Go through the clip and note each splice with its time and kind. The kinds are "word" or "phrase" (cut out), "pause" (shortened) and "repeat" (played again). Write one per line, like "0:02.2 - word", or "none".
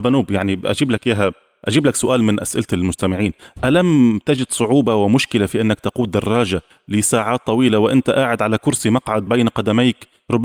0:09.3 - word